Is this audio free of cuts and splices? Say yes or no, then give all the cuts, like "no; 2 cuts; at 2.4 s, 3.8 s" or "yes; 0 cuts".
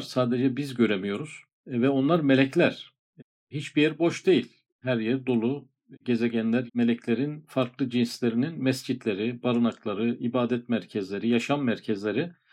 no; 3 cuts; at 1.5 s, 4.7 s, 6.7 s